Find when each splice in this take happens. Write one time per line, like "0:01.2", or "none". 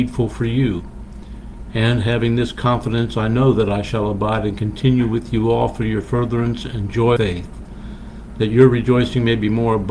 0:07.2